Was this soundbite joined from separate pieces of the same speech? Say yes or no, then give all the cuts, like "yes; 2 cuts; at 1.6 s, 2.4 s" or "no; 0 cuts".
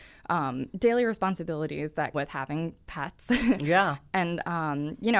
yes; 1 cut; at 2.1 s